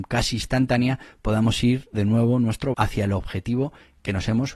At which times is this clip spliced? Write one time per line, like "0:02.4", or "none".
0:01.9
0:02.7